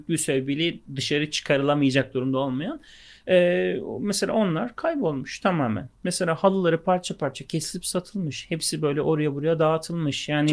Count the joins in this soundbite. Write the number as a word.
zero